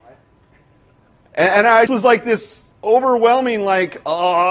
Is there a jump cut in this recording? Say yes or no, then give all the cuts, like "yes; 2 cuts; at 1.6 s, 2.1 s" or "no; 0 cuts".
yes; 2 cuts; at 1.9 s, 2.8 s